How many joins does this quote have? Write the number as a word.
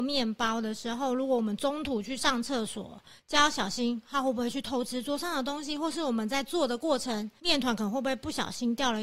zero